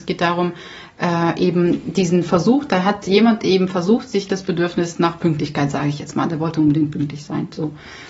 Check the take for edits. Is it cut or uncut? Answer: uncut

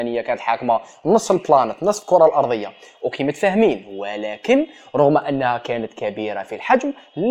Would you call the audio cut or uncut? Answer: uncut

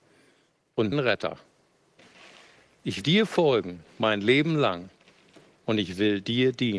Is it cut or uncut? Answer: cut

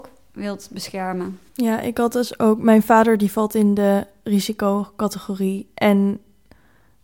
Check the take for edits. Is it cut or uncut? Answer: cut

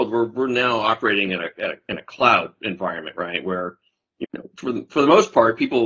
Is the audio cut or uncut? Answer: cut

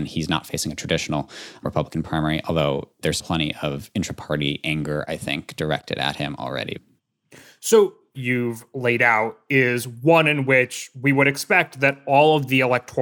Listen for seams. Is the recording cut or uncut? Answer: cut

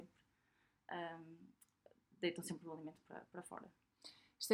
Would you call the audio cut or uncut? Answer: uncut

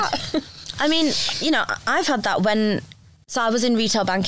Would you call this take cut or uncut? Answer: uncut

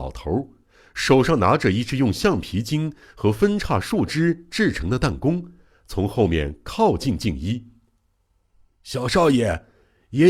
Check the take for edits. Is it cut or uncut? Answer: uncut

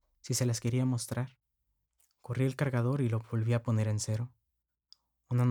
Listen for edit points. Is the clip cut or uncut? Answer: cut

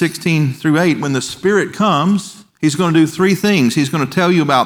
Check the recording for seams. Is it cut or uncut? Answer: cut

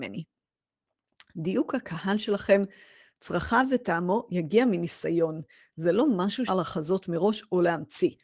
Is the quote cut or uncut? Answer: cut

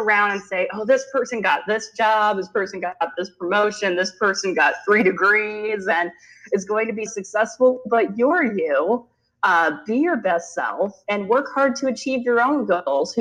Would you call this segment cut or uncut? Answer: cut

